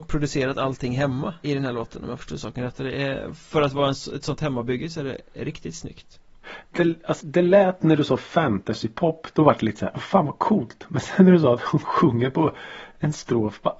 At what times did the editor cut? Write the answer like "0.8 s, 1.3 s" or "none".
1.4 s, 7.2 s, 9.9 s